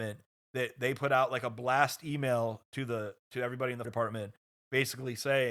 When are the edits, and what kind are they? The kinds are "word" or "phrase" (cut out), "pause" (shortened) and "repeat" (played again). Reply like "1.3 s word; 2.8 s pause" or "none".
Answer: 3.8 s word